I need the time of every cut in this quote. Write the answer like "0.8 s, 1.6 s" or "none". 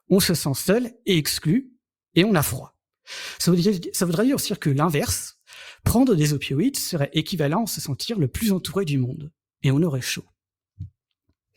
none